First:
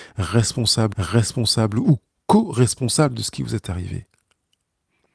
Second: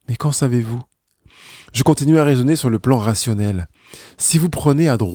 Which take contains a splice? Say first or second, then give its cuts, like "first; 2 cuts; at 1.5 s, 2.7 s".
first; 1 cut; at 0.9 s